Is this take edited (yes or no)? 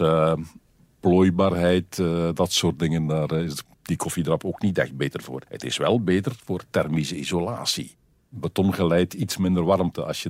yes